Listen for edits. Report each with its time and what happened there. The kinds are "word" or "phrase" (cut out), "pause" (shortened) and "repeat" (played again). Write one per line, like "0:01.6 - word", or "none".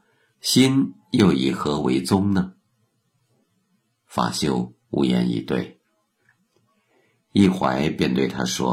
none